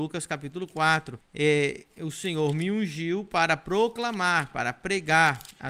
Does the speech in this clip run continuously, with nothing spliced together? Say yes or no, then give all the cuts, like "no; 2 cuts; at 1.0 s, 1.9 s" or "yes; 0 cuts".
yes; 0 cuts